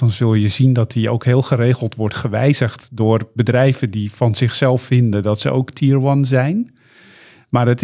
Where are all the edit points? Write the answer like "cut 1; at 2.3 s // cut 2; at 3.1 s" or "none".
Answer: none